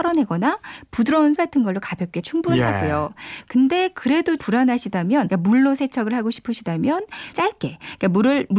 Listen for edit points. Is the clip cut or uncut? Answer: cut